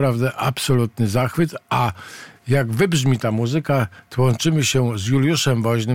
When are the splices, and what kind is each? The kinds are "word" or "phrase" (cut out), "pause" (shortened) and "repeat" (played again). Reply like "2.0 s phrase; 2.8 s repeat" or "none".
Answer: none